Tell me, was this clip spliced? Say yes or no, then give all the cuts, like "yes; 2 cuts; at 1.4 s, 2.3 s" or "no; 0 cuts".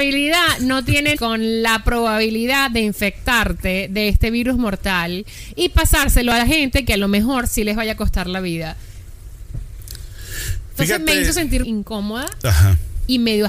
yes; 2 cuts; at 1.1 s, 11.6 s